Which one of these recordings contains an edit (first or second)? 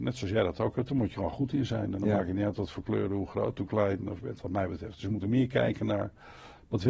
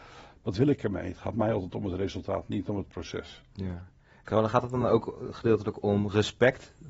first